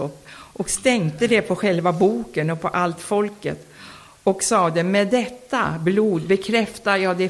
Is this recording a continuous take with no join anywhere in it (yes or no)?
yes